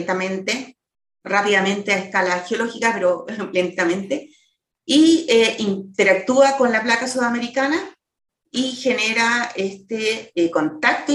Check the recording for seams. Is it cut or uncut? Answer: uncut